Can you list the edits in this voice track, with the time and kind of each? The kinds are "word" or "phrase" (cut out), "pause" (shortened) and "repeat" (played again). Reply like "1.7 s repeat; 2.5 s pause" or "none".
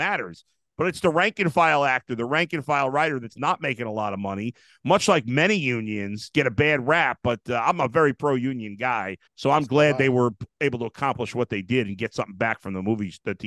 9.3 s pause

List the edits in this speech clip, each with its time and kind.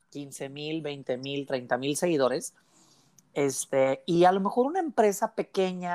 none

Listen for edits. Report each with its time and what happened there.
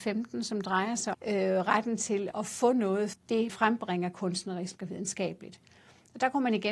1.1 s word; 2.3 s word; 3.1 s word; 3.5 s word

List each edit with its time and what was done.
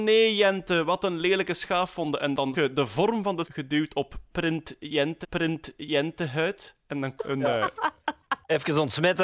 2.5 s word; 3.4 s word; 5.2 s repeat; 7.2 s phrase

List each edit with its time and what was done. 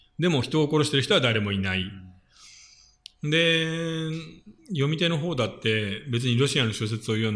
4.6 s pause

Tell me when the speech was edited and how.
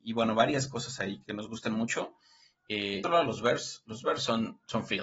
1.2 s word; 3.0 s phrase

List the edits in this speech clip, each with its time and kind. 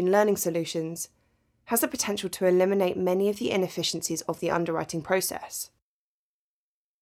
none

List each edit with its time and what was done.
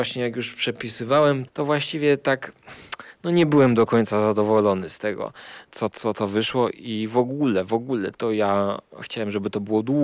1.5 s word

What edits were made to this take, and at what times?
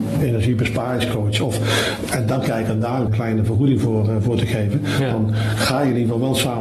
3.1 s word

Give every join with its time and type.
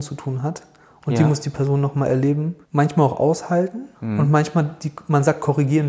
2.6 s pause; 3.9 s pause

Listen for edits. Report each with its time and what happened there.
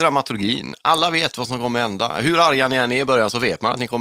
none

